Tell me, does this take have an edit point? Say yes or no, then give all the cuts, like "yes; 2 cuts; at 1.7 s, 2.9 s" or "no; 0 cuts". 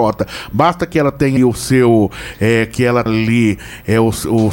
yes; 2 cuts; at 1.4 s, 3.1 s